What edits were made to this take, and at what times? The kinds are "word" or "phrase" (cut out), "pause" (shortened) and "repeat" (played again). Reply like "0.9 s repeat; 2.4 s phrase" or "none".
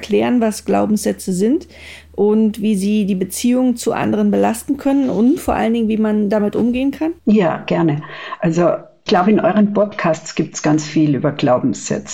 7.2 s pause; 9.1 s word